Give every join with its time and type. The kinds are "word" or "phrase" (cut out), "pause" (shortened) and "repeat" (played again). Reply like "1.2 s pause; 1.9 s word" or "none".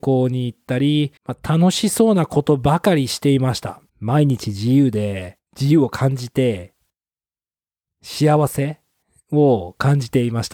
1.2 s pause; 3.9 s pause; 5.5 s pause